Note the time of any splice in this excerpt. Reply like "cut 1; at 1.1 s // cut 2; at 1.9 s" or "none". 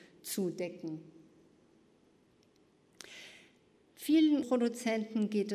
cut 1; at 4.4 s